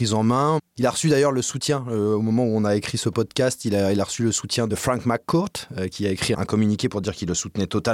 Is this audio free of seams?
yes; 0 cuts

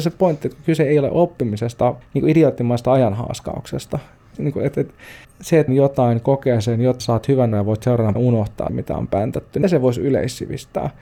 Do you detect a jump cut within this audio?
yes; 9 cuts; at 2.0 s, 4.3 s, 5.2 s, 5.7 s, 7.0 s, 7.5 s, 8.1 s, 8.7 s, 9.6 s

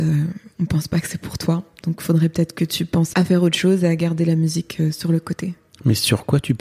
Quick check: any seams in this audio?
yes; 1 cut; at 3.1 s

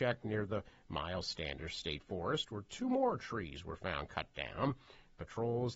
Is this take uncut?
yes; 0 cuts

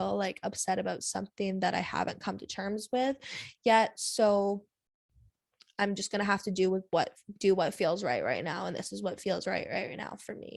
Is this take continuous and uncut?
yes; 0 cuts

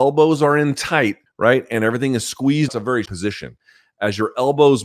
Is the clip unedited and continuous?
no; 3 cuts; at 1.3 s, 2.7 s, 3.1 s

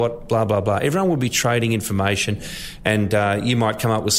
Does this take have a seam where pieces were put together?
no; 0 cuts

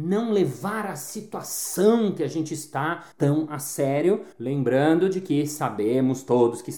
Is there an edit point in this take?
yes; 2 cuts; at 3.1 s, 4.3 s

